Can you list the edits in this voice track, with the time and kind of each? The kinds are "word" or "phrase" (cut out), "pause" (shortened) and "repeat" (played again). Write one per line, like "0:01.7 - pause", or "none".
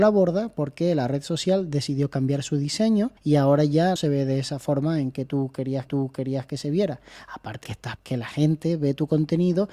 0:03.2 - pause
0:04.0 - word
0:05.9 - repeat
0:07.6 - word
0:08.0 - word